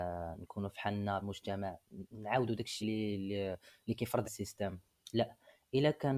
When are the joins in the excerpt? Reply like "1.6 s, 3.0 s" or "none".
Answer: 1.2 s, 2.8 s, 4.2 s